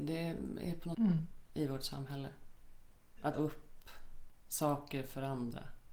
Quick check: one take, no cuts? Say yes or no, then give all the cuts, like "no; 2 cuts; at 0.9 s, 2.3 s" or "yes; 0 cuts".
no; 2 cuts; at 0.9 s, 3.3 s